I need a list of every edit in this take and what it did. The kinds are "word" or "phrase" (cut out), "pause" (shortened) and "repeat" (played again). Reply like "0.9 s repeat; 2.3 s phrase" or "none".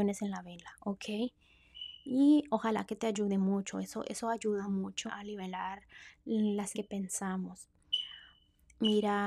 5.1 s word; 6.7 s word